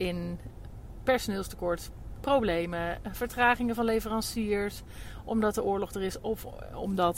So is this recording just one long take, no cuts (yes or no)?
no